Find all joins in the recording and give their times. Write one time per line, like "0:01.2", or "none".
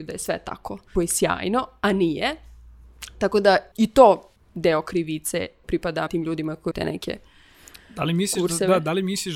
0:00.9
0:03.7
0:04.4
0:05.6
0:06.1
0:06.7

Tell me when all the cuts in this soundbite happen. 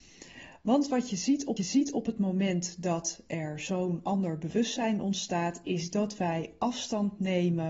0:01.6

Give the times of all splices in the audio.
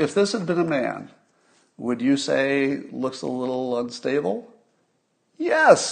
none

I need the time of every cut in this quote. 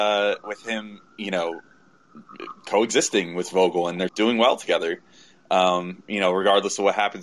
0:04.1

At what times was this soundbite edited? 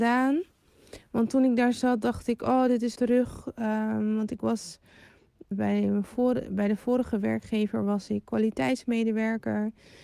0:03.0
0:05.5

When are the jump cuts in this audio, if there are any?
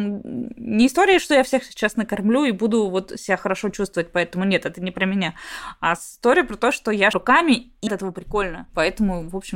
0:07.1
0:07.9

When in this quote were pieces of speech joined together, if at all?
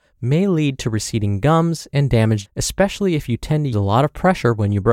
0:02.4
0:03.7

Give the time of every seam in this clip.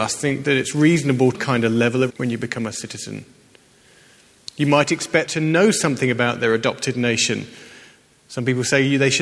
0:01.3
0:02.1
0:05.3

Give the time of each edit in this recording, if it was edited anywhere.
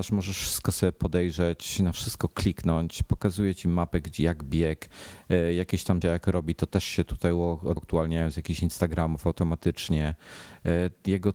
0:06.0
0:07.8

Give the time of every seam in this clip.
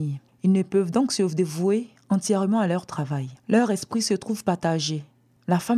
0:03.4

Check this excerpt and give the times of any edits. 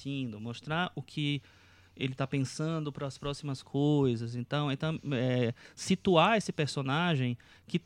none

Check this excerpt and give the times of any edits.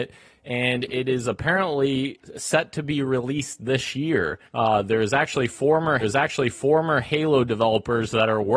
0:04.5
0:06.0

